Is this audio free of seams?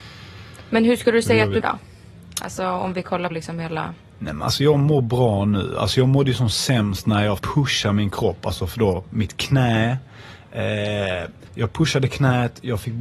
no; 4 cuts; at 1.6 s, 3.3 s, 7.4 s, 11.5 s

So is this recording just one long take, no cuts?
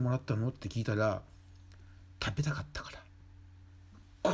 yes; 0 cuts

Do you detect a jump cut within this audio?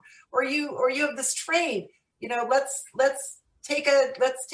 no; 0 cuts

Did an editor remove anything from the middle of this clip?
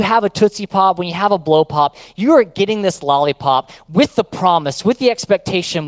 no; 0 cuts

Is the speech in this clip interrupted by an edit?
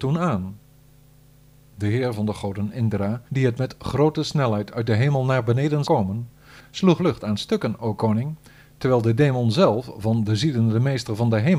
yes; 3 cuts; at 3.3 s, 5.8 s, 7.0 s

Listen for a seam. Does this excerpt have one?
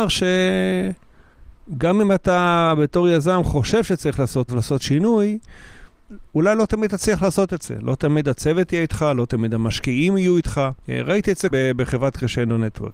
yes; 3 cuts; at 4.5 s, 10.8 s, 11.5 s

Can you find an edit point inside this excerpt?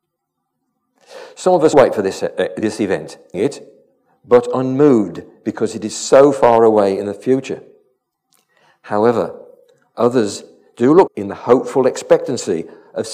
yes; 4 cuts; at 1.7 s, 2.2 s, 3.3 s, 11.1 s

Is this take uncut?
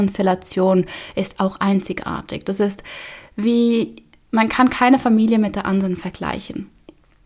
yes; 0 cuts

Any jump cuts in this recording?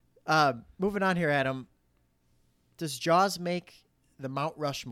no; 0 cuts

